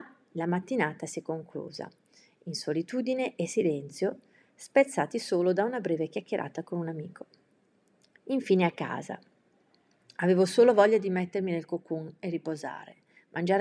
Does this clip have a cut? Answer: no; 0 cuts

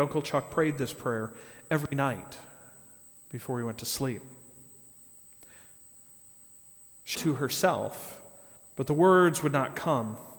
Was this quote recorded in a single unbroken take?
no; 1 cut; at 7.1 s

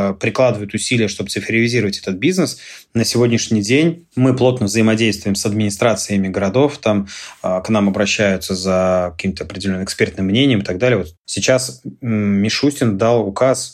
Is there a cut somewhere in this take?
no; 0 cuts

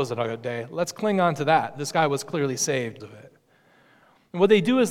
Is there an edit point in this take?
yes; 1 cut; at 3.0 s

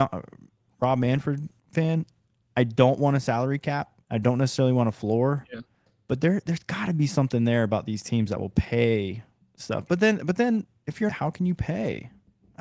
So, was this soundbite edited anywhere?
yes; 3 cuts; at 1.6 s, 4.0 s, 11.1 s

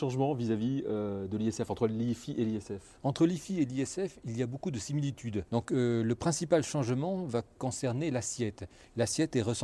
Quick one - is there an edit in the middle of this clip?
no; 0 cuts

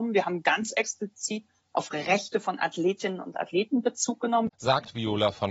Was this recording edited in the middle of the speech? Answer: yes; 1 cut; at 4.5 s

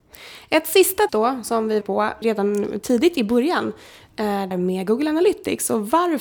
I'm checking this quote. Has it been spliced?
yes; 4 cuts; at 1.1 s, 1.8 s, 2.2 s, 4.5 s

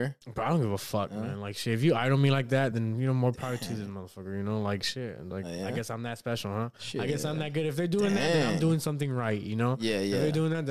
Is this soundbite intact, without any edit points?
yes; 0 cuts

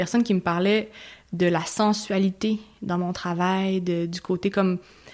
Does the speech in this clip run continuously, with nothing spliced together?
yes; 0 cuts

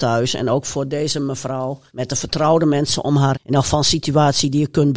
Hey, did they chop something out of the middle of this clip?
yes; 2 cuts; at 1.9 s, 3.3 s

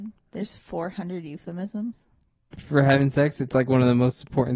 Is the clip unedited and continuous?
yes; 0 cuts

